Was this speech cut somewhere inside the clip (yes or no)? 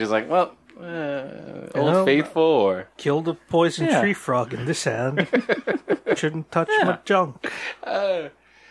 yes